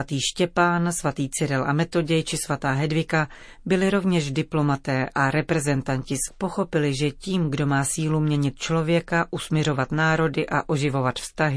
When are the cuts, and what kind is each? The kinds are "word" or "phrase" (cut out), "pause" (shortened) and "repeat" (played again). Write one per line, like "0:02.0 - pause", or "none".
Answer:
0:06.3 - phrase

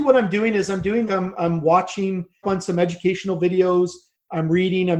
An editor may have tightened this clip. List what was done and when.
0:01.1 - word
0:02.4 - phrase

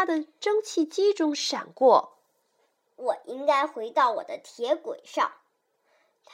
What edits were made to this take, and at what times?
0:02.4 - pause

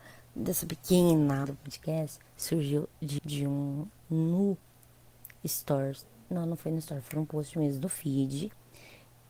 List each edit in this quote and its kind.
0:01.4 - word
0:02.3 - pause
0:03.2 - word
0:04.0 - word

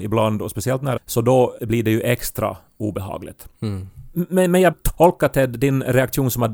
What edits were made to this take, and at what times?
0:01.0 - phrase
0:01.6 - word
0:03.5 - pause
0:04.7 - word

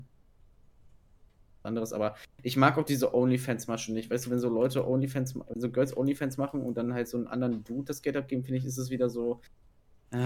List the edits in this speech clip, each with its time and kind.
none

